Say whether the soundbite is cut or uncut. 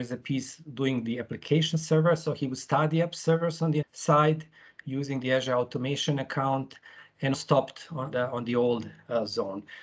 cut